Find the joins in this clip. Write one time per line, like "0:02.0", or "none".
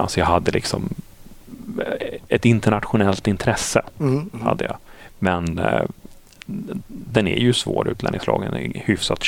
none